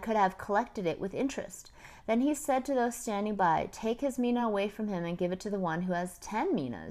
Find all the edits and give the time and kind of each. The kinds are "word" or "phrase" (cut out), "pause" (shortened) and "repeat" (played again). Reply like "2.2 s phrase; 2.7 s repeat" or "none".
none